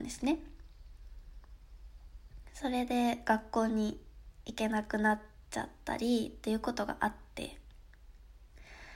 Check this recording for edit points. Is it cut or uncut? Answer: uncut